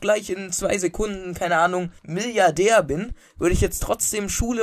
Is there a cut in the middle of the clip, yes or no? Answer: yes